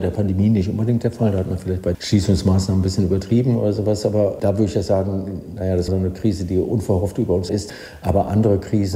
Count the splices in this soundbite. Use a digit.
3